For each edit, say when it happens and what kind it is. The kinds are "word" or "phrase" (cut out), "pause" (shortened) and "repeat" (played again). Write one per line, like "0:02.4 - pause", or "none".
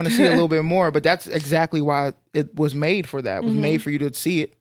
none